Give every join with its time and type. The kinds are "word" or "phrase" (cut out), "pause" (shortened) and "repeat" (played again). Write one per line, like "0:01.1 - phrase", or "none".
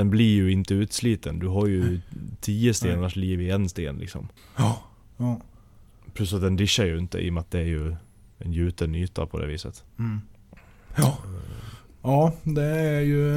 0:04.4 - pause
0:09.9 - pause

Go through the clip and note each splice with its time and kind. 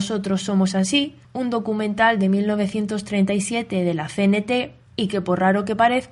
0:01.2 - pause

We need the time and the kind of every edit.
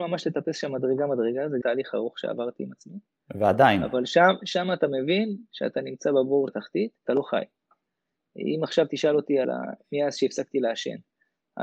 0:01.6 - word
0:04.4 - word
0:06.5 - word
0:07.1 - word
0:09.4 - phrase

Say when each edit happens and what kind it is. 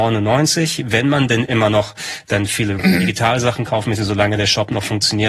0:02.8 - phrase

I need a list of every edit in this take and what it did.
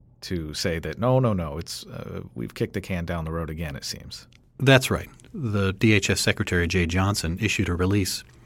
none

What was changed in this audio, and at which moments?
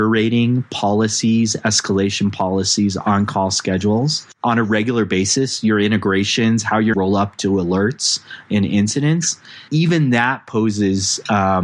0:06.9 - word
0:09.7 - word

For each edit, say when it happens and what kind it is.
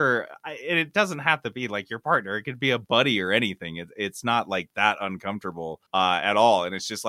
0:05.9 - pause

